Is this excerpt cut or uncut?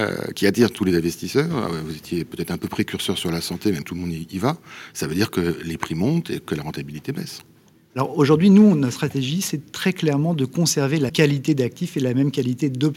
cut